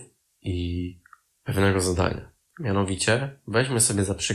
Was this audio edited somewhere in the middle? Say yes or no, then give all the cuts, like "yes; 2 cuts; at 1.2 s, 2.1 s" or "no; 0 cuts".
yes; 1 cut; at 1.3 s